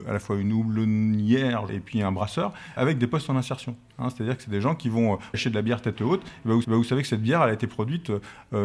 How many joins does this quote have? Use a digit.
4